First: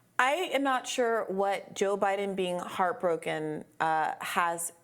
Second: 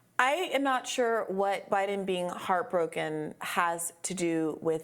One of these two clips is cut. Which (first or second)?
second